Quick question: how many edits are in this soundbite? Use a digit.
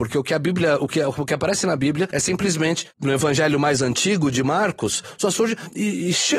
0